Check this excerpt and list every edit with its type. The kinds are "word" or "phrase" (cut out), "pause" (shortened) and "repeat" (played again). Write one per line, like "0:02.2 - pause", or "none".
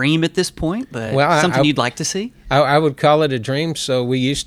none